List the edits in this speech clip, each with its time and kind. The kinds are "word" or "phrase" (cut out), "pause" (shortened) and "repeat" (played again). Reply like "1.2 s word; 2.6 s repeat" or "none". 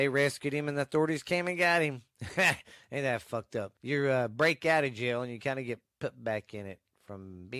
3.8 s pause